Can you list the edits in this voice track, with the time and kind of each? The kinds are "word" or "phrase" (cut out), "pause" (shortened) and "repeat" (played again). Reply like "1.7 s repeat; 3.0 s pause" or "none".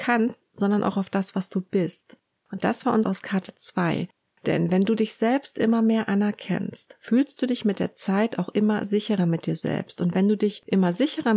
3.0 s word